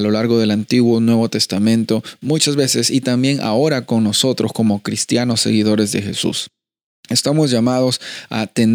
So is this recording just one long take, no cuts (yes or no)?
yes